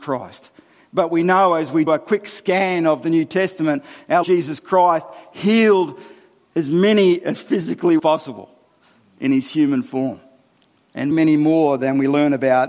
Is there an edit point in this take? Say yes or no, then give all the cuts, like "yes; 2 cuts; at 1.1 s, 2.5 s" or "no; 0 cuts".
yes; 4 cuts; at 1.9 s, 4.2 s, 8.0 s, 11.1 s